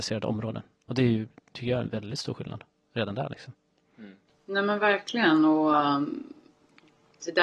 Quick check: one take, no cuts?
yes; 0 cuts

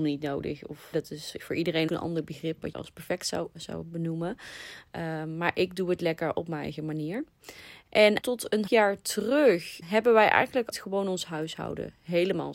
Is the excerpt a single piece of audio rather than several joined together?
no; 8 cuts; at 0.9 s, 1.9 s, 2.7 s, 3.5 s, 8.2 s, 8.7 s, 9.8 s, 10.7 s

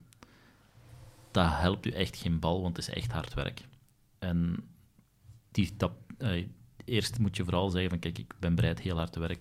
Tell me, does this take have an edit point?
no; 0 cuts

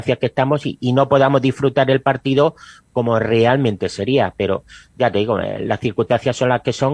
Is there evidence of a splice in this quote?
no; 0 cuts

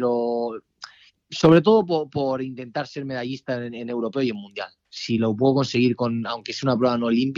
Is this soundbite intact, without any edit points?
yes; 0 cuts

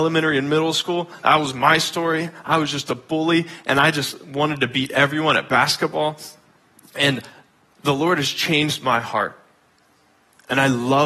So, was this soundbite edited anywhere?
no; 0 cuts

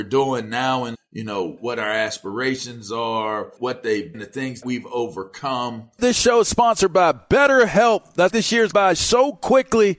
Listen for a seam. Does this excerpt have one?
yes; 8 cuts; at 0.9 s, 1.6 s, 3.6 s, 4.1 s, 4.6 s, 6.0 s, 8.3 s, 8.7 s

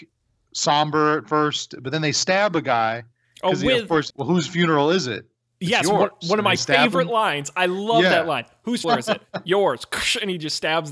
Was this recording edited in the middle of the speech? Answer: yes; 2 cuts; at 4.1 s, 8.8 s

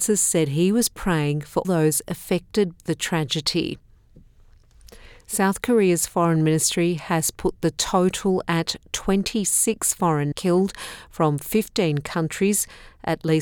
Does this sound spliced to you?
yes; 3 cuts; at 1.6 s, 2.8 s, 10.3 s

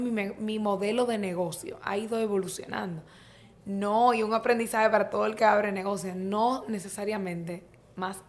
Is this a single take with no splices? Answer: yes; 0 cuts

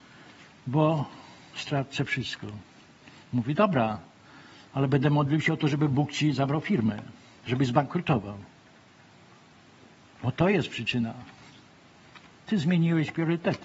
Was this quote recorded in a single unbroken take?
yes; 0 cuts

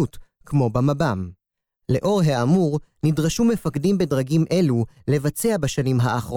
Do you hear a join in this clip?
no; 0 cuts

